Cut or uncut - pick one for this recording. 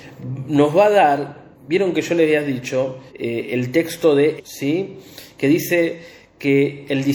cut